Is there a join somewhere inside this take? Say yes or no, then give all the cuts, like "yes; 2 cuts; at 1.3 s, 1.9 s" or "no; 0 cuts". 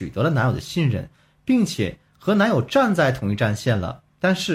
no; 0 cuts